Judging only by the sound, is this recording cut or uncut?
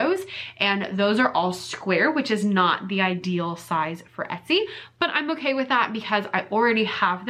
uncut